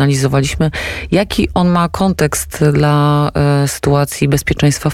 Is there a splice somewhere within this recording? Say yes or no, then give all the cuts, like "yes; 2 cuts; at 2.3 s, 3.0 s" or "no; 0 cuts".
no; 0 cuts